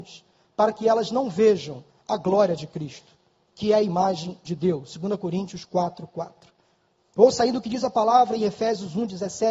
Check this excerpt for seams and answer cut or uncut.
uncut